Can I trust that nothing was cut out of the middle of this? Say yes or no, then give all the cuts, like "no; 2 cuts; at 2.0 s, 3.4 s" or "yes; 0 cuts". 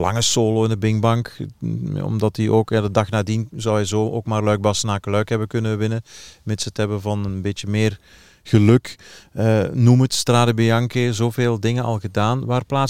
yes; 0 cuts